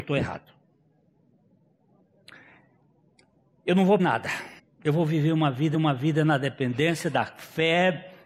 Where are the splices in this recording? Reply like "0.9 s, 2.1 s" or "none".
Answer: 4.0 s, 4.6 s, 5.7 s

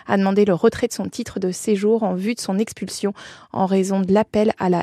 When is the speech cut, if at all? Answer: none

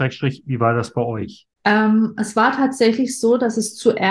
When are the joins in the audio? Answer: 1.5 s

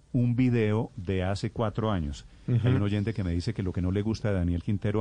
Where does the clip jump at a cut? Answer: none

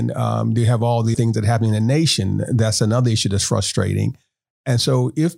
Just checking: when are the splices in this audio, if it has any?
1.1 s

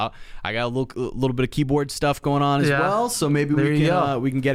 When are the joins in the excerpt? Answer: none

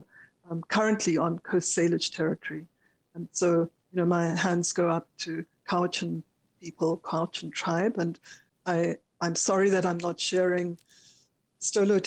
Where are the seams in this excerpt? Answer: none

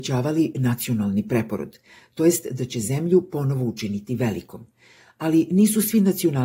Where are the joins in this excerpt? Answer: none

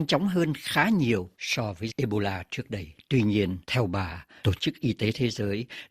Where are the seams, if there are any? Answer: 1.4 s, 1.9 s, 3.6 s

